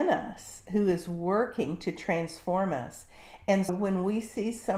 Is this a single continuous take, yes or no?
no